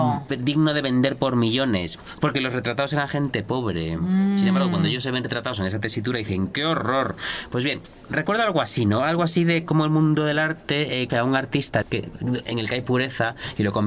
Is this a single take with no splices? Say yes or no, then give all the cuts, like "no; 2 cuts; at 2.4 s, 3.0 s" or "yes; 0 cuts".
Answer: no; 3 cuts; at 9.7 s, 11.1 s, 11.8 s